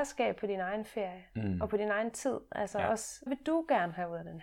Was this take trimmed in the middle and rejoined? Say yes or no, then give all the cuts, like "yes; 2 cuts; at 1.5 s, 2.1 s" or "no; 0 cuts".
yes; 1 cut; at 3.3 s